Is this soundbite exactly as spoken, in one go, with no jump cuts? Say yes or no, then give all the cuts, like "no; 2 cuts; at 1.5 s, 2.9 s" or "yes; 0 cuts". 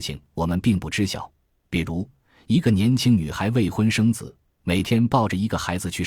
yes; 0 cuts